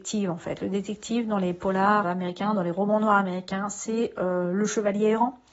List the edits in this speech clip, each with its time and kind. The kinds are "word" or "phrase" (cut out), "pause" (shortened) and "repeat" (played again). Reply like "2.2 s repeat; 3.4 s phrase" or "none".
2.0 s word